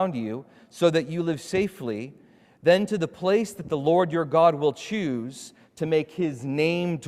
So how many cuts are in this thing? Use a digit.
0